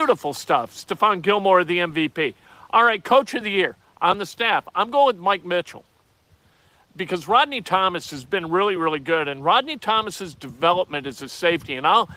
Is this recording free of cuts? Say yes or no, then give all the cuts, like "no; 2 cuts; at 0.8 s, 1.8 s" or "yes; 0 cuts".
yes; 0 cuts